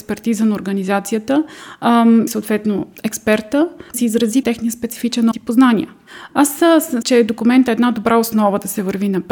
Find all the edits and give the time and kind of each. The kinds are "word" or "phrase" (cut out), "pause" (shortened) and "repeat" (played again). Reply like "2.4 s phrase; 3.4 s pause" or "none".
2.3 s word; 3.9 s word; 4.4 s phrase; 5.3 s word; 7.0 s word